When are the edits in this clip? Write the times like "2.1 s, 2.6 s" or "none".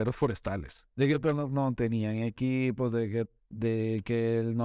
0.9 s, 3.4 s